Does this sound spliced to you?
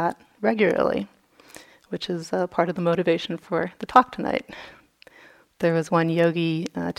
no; 0 cuts

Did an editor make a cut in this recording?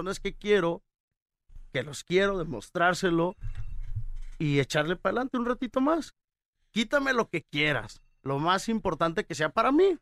no; 0 cuts

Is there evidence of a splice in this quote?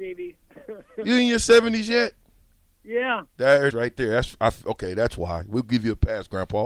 yes; 1 cut; at 3.7 s

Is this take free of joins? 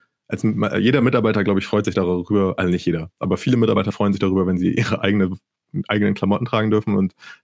yes; 0 cuts

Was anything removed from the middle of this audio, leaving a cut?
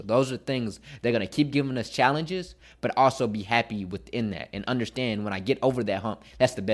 no; 0 cuts

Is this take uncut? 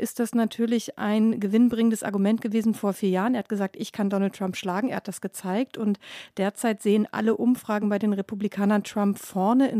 yes; 0 cuts

